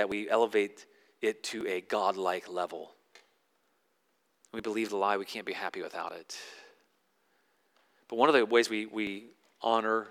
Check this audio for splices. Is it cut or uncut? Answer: uncut